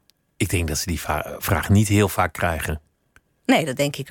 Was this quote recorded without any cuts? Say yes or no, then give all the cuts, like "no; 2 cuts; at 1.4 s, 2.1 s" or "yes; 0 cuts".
yes; 0 cuts